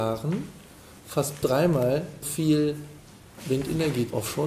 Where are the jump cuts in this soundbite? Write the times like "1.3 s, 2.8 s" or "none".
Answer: 2.2 s